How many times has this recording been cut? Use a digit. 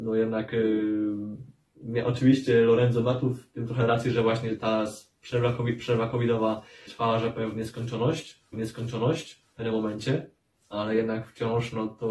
4